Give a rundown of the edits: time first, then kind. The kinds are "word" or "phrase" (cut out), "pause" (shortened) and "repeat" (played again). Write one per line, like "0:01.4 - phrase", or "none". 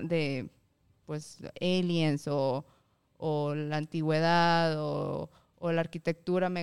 none